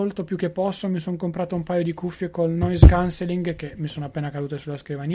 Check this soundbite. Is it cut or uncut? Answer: uncut